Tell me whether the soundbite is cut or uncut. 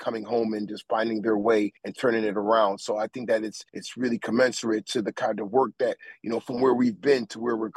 cut